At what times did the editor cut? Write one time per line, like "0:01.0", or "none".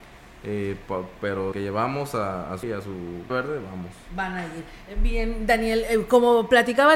0:01.5
0:02.6
0:03.3

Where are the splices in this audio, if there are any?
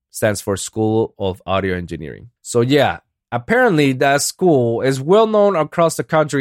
0:02.4

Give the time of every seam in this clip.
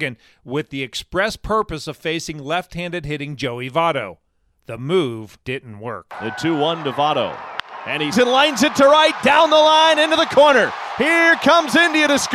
0:05.4
0:08.1

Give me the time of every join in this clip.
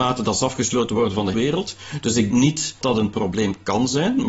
0:01.3
0:02.3
0:02.8

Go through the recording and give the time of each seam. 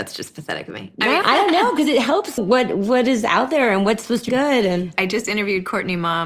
0:01.2
0:02.4
0:04.3

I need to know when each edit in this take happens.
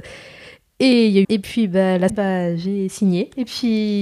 0:01.2
0:02.1

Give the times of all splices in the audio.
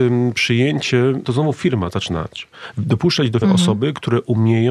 0:01.2
0:03.4

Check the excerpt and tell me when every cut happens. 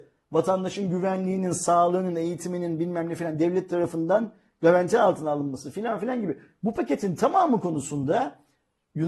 none

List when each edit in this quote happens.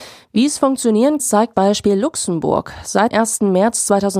0:01.2
0:01.5
0:03.1

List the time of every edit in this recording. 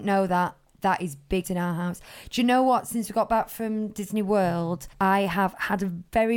0:01.4
0:04.9

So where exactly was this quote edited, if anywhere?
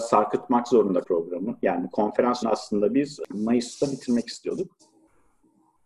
0:01.0
0:02.4

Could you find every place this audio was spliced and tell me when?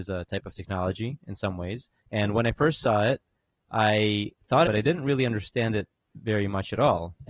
0:02.0
0:04.6

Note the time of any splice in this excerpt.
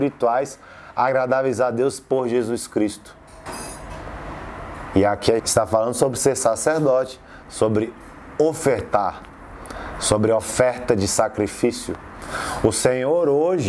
0:05.4

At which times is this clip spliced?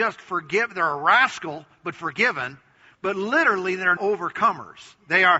0:04.0

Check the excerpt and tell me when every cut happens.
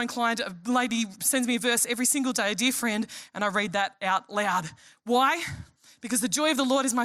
none

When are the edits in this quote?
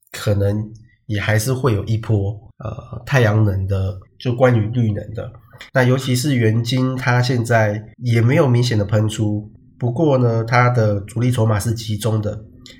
0:02.5
0:04.1
0:05.7
0:07.9
0:09.6

